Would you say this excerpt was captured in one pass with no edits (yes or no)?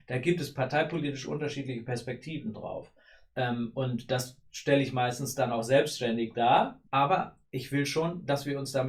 no